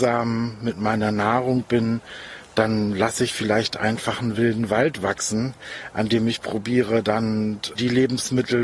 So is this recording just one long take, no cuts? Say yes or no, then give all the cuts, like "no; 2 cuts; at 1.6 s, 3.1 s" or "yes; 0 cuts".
yes; 0 cuts